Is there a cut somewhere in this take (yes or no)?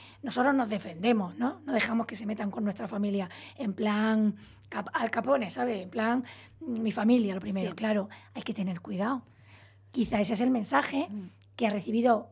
no